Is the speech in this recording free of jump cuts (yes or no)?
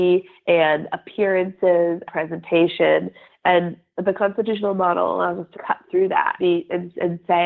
no